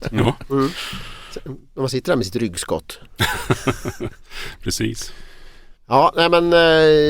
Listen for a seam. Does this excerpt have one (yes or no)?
no